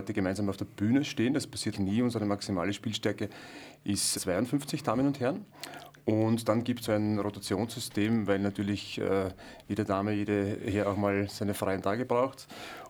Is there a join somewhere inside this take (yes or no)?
yes